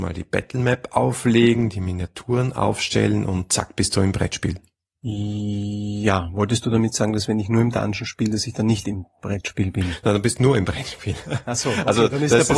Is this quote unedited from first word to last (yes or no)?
yes